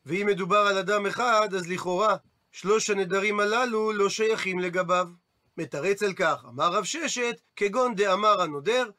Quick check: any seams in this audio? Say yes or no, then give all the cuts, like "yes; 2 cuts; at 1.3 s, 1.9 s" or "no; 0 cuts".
yes; 1 cut; at 7.5 s